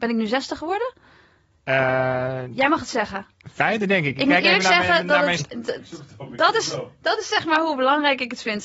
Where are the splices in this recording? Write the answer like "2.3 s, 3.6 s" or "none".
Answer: 5.4 s